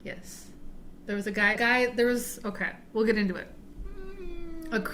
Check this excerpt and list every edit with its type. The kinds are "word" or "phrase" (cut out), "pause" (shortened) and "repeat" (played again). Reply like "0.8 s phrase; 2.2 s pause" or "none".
1.6 s word